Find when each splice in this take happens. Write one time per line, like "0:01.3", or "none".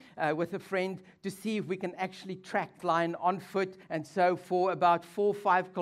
0:02.8
0:03.8